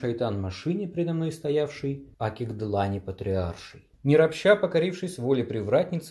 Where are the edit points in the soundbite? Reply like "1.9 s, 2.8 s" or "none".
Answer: 2.1 s, 3.9 s